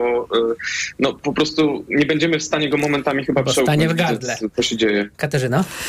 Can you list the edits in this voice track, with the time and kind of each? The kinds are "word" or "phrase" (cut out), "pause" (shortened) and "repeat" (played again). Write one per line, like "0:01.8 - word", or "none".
none